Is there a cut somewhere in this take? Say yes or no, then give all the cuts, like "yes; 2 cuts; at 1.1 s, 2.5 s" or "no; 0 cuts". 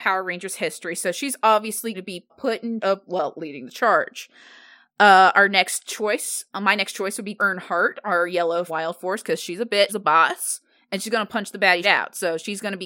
yes; 7 cuts; at 1.9 s, 2.3 s, 2.8 s, 7.4 s, 8.7 s, 9.9 s, 11.8 s